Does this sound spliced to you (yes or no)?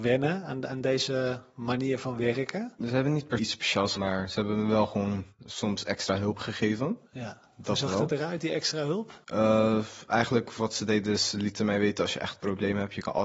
yes